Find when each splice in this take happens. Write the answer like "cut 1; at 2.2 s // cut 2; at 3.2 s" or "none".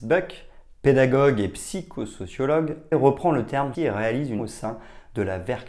cut 1; at 2.9 s // cut 2; at 3.7 s // cut 3; at 4.4 s